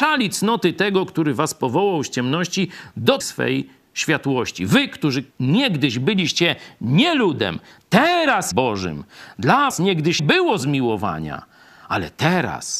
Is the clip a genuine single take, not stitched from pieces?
no; 5 cuts; at 3.2 s, 5.3 s, 8.5 s, 9.7 s, 10.2 s

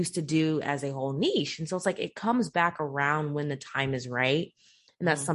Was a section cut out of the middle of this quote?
no; 0 cuts

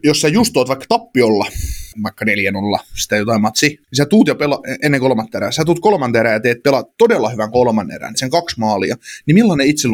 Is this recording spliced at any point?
yes; 3 cuts; at 1.9 s, 3.8 s, 8.1 s

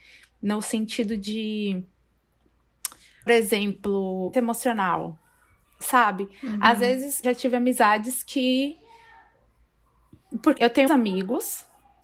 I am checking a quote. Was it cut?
yes; 5 cuts; at 3.3 s, 4.3 s, 7.2 s, 10.6 s, 10.9 s

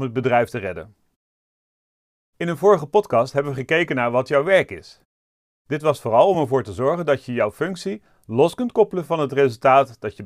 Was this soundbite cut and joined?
no; 0 cuts

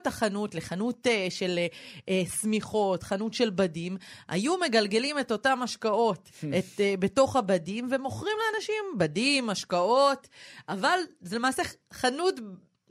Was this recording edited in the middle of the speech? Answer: no; 0 cuts

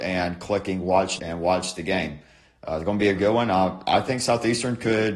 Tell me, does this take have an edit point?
yes; 2 cuts; at 1.2 s, 3.2 s

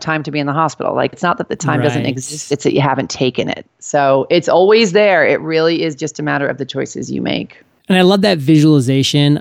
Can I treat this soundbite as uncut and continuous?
yes; 0 cuts

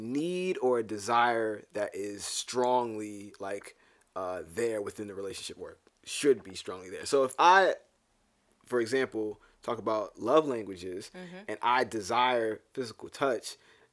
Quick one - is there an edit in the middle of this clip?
no; 0 cuts

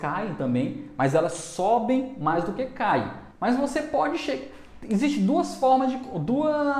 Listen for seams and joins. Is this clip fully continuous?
no; 1 cut; at 3.3 s

